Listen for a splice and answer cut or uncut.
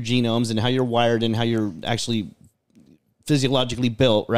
uncut